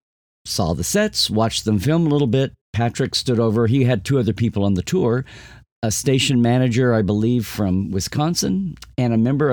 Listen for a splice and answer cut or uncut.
cut